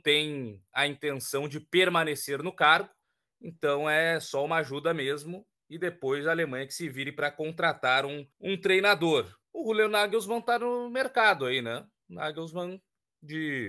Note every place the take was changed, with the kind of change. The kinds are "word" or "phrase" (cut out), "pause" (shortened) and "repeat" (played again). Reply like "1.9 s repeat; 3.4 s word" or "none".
3.0 s pause; 8.3 s pause; 9.4 s pause